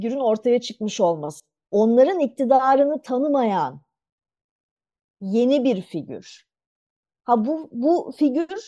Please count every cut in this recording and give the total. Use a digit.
0